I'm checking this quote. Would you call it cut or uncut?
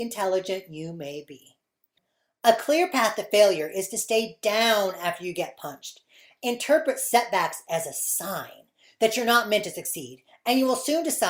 uncut